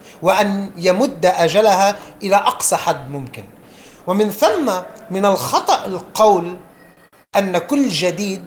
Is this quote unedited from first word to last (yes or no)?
yes